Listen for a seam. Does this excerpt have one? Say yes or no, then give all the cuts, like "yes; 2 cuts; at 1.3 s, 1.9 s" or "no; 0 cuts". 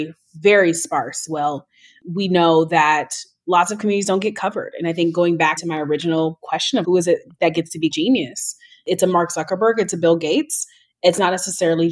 yes; 4 cuts; at 1.3 s, 5.6 s, 6.8 s, 7.9 s